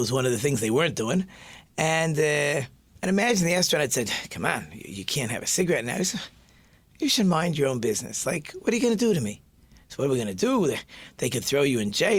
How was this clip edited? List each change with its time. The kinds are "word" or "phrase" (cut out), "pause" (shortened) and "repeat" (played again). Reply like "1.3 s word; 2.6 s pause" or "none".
none